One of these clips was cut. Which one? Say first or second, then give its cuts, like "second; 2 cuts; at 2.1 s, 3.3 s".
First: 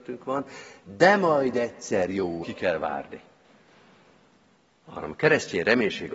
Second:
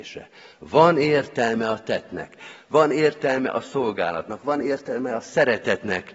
first; 1 cut; at 2.4 s